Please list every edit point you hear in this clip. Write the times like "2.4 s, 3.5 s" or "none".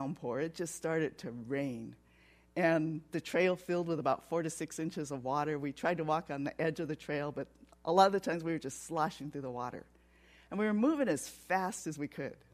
none